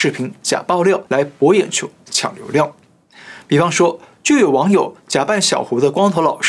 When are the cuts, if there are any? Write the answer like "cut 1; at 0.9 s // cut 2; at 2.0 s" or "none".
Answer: cut 1; at 1.1 s